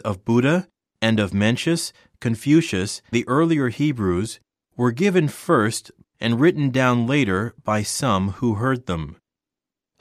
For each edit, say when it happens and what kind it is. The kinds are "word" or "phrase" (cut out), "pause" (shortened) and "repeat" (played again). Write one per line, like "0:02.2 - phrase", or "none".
0:03.1 - word
0:06.0 - phrase